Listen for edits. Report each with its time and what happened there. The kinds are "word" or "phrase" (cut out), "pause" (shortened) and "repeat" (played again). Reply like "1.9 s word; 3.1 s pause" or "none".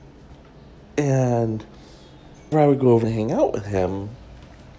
2.5 s word; 3.0 s word